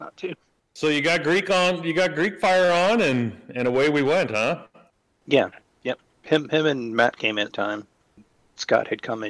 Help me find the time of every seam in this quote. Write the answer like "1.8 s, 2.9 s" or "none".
7.5 s